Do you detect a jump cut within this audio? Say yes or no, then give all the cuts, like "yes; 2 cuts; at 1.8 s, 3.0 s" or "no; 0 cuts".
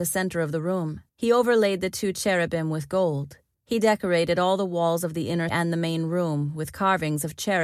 yes; 3 cuts; at 1.1 s, 3.5 s, 5.5 s